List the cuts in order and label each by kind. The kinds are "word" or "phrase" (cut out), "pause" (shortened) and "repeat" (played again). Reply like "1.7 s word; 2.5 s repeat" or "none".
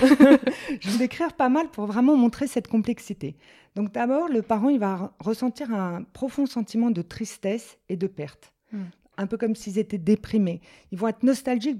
0.9 s word